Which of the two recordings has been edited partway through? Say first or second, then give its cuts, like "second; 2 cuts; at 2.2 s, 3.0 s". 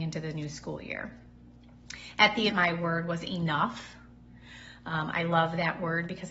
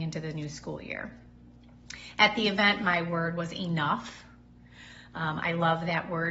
first; 1 cut; at 2.5 s